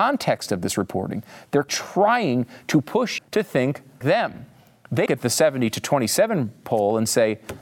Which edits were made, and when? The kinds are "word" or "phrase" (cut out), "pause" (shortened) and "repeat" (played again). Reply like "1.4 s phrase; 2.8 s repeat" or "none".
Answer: 1.7 s word; 3.2 s word; 4.0 s word; 5.1 s word